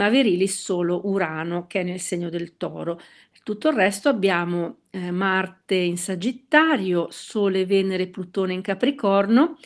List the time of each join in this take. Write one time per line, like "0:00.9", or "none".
none